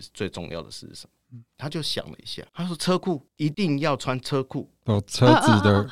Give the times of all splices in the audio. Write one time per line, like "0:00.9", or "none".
0:02.5
0:03.3